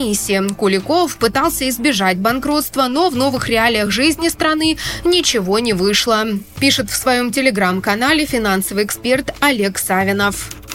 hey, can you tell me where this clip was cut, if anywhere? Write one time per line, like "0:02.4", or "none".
none